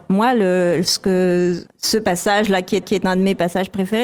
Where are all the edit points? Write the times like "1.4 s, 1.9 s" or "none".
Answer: 1.7 s, 2.8 s